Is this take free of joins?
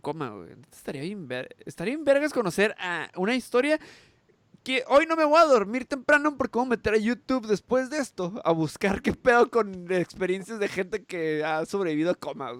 yes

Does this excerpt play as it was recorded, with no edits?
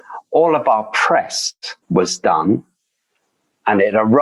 no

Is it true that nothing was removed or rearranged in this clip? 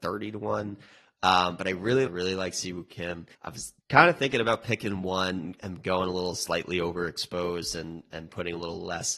no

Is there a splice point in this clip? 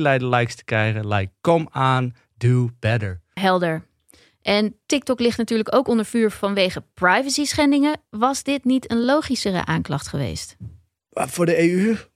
no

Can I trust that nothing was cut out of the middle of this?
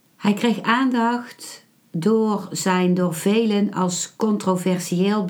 yes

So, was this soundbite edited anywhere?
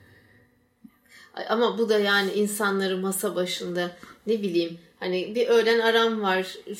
no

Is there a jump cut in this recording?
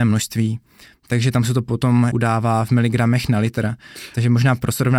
yes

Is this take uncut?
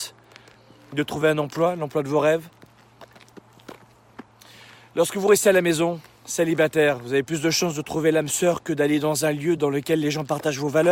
yes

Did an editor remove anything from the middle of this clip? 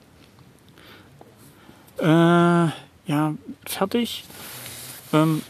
yes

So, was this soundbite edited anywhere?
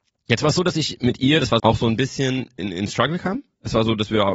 yes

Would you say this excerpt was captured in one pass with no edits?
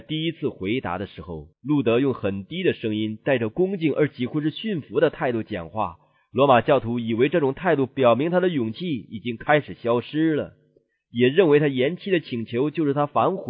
no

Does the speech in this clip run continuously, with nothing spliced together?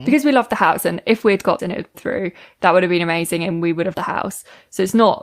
no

